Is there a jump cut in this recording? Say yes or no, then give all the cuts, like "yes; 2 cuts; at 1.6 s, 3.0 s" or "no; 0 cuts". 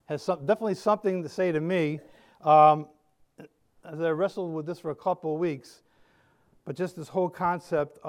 no; 0 cuts